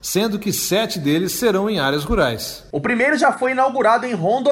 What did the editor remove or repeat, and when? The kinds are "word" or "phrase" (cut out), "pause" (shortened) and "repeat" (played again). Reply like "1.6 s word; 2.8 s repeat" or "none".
none